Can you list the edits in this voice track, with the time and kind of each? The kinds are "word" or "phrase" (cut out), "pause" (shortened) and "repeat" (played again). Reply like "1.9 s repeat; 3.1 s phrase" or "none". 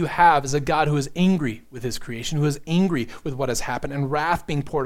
none